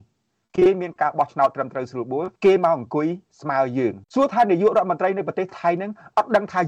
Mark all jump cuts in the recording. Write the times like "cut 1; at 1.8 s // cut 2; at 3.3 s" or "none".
cut 1; at 2.4 s // cut 2; at 4.0 s